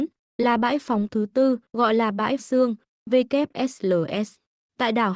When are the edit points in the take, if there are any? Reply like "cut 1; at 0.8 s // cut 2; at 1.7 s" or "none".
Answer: cut 1; at 1.6 s // cut 2; at 2.4 s